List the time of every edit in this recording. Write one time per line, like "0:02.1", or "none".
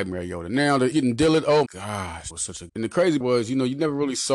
0:00.9
0:01.7
0:02.3
0:02.7
0:03.2